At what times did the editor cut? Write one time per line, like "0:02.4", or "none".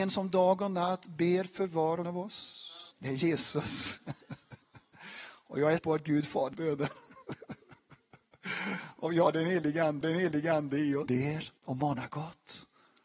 0:02.0
0:02.9
0:05.8
0:06.5
0:10.0
0:11.1
0:11.6